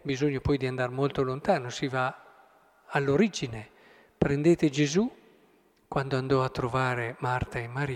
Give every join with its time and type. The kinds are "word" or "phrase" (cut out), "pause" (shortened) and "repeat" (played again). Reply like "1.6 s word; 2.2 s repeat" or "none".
none